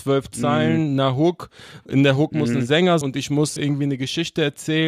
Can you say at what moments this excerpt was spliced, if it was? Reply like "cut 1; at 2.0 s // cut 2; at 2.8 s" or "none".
cut 1; at 3.0 s // cut 2; at 3.6 s